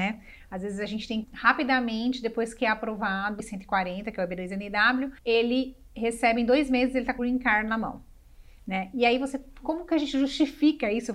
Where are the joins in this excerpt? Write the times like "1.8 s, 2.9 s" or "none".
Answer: 1.2 s, 3.4 s, 5.2 s, 7.2 s